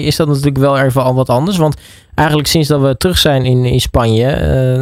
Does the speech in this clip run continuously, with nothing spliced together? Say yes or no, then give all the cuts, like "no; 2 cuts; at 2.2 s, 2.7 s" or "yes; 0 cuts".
yes; 0 cuts